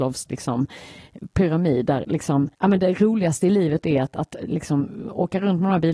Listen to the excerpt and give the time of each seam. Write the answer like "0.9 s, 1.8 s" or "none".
2.5 s